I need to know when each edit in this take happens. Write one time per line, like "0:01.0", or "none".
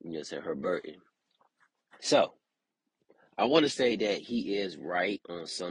none